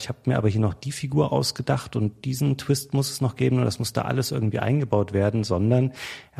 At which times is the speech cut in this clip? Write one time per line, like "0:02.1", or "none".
none